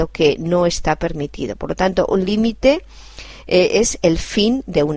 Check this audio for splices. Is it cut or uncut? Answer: uncut